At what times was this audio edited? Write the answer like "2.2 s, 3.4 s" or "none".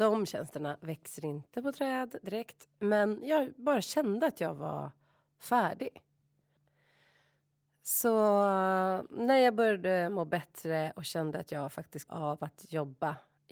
12.1 s